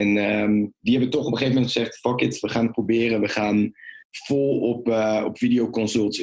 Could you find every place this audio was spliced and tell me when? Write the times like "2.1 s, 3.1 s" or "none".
4.0 s